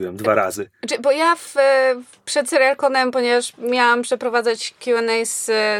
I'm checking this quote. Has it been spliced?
no; 0 cuts

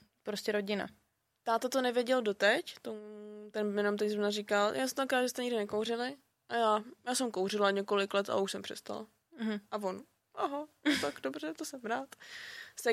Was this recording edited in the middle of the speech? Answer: no; 0 cuts

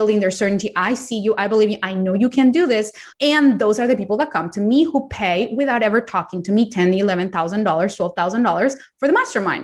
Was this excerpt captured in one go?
no; 1 cut; at 3.1 s

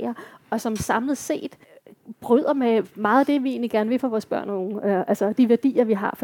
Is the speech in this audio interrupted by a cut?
no; 0 cuts

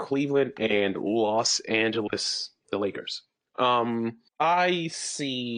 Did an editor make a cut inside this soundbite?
yes; 1 cut; at 4.3 s

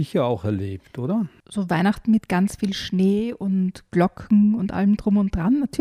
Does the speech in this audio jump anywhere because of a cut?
no; 0 cuts

